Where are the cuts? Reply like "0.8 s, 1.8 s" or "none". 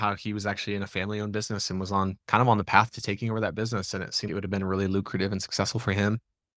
2.2 s, 4.3 s

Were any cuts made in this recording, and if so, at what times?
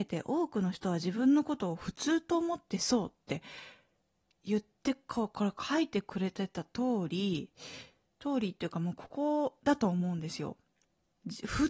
none

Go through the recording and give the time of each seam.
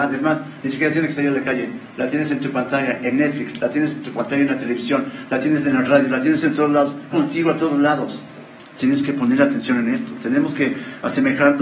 7.1 s

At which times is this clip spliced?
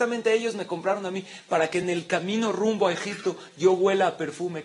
none

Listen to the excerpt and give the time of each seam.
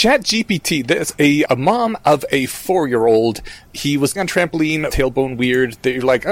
1.5 s, 4.2 s, 4.9 s

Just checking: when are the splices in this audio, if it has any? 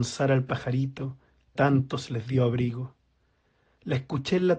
1.6 s

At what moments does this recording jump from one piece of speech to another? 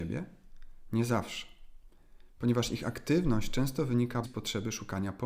4.2 s

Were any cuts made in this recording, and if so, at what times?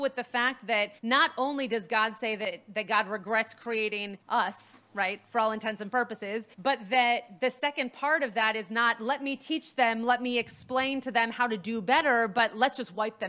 1.0 s, 4.2 s, 6.5 s

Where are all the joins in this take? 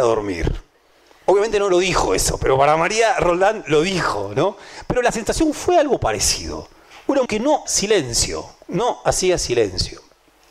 7.3 s, 7.7 s

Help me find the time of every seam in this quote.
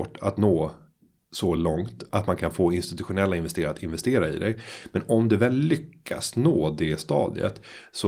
none

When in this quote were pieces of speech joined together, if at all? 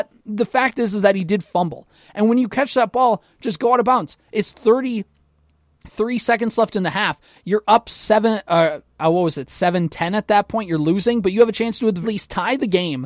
12.0 s

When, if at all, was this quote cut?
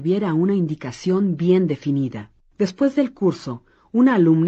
2.4 s

